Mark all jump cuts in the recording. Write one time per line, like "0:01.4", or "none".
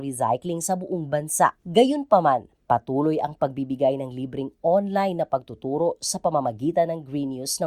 0:01.6